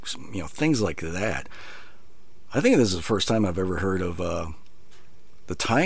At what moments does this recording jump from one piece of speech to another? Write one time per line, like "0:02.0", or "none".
none